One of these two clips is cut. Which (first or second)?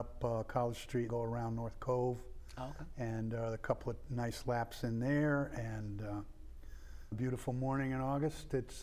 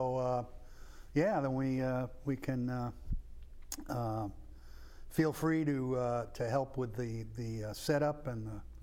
first